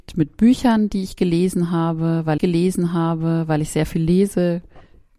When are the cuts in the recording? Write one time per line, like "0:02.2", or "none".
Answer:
0:02.4

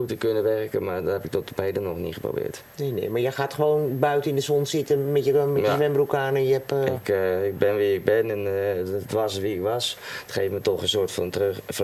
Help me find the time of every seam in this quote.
0:02.7

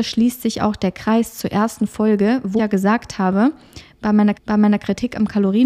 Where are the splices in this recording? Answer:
0:02.6
0:04.3

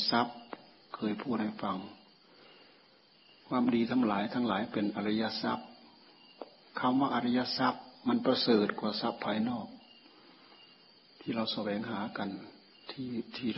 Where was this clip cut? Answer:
none

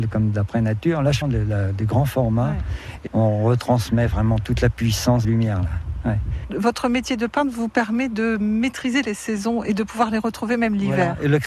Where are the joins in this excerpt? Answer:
0:01.2
0:03.1
0:05.2

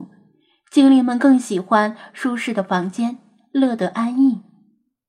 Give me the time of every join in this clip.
none

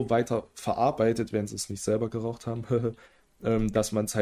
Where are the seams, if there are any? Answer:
0:03.0

